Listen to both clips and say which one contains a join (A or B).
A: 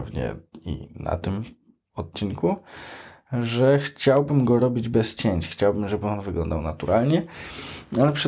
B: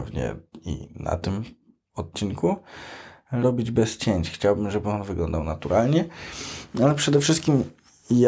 B